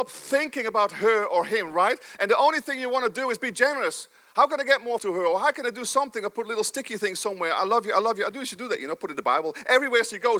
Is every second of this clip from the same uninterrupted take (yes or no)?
no